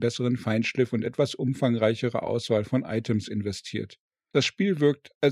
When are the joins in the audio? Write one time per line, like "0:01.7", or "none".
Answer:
none